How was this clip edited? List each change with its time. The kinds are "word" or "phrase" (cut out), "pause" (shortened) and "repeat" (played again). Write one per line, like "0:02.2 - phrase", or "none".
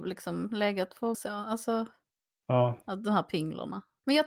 0:01.1 - phrase